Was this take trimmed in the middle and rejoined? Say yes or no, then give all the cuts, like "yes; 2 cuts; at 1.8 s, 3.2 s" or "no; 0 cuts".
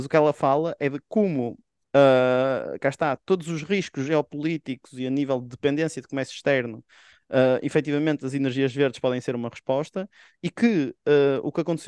no; 0 cuts